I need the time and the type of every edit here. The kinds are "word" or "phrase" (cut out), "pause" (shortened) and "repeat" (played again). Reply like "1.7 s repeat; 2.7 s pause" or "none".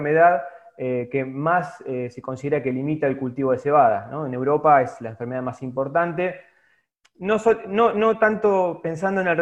none